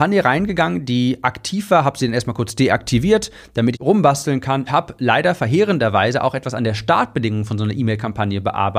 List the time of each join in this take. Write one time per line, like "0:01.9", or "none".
0:03.7
0:04.7